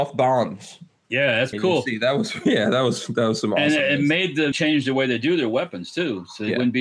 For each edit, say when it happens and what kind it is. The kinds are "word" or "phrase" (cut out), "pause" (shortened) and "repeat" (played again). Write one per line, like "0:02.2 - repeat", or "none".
0:01.5 - word
0:04.5 - word

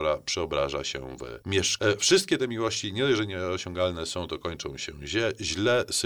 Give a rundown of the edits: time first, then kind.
none

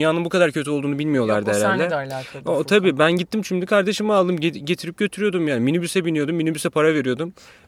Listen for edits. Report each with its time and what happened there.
none

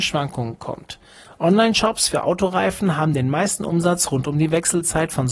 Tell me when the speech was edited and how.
none

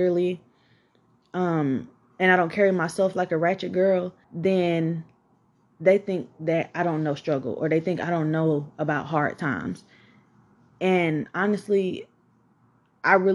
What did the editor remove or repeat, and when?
0:04.2 - pause

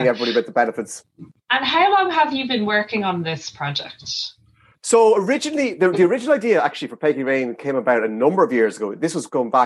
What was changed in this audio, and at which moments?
none

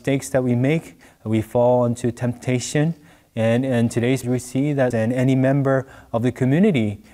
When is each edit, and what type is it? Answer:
0:04.2 - word
0:04.9 - word

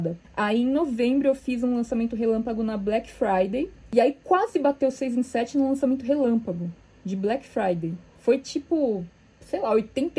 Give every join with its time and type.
0:08.1 - pause

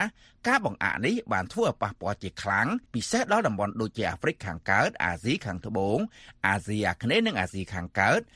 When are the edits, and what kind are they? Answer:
0:02.8 - pause

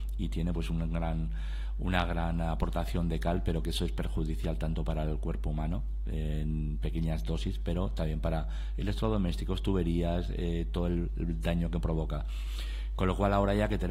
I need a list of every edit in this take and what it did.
none

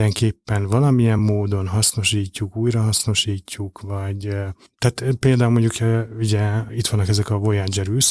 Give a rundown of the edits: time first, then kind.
none

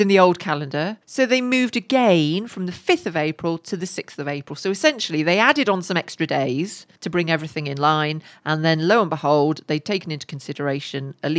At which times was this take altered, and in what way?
0:01.0 - pause
0:06.9 - pause

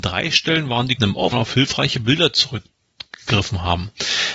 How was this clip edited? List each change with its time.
0:01.0 - word
0:01.3 - phrase

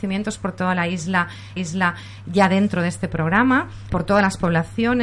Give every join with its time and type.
0:01.6 - repeat
0:03.9 - word

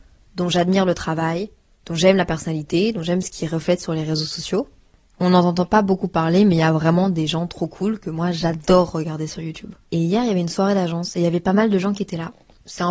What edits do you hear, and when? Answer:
0:09.8 - pause

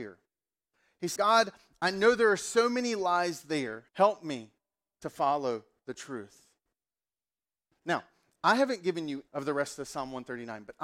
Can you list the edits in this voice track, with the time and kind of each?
0:01.2 - word
0:03.9 - pause
0:09.3 - word

